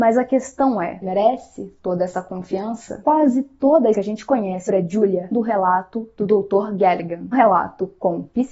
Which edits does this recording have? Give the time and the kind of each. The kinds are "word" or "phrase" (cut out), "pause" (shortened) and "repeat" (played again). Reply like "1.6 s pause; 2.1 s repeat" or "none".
1.0 s word; 3.9 s word; 4.7 s word; 5.3 s word; 7.3 s word